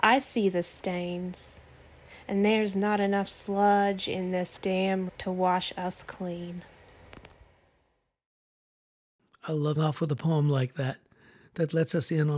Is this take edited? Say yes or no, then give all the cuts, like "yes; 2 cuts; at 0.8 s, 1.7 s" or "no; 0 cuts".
yes; 3 cuts; at 4.6 s, 5.1 s, 9.8 s